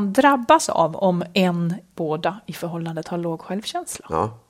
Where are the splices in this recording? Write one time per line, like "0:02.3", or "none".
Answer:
0:01.9